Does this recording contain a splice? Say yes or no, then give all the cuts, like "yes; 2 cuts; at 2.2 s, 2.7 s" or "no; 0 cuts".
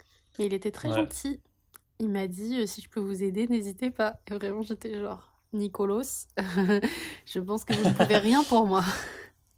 no; 0 cuts